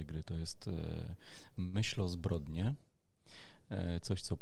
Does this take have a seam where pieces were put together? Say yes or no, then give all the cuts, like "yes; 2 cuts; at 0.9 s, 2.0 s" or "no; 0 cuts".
no; 0 cuts